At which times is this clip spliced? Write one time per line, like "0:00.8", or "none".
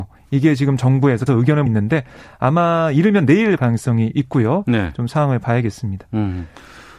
0:01.3
0:01.7
0:03.6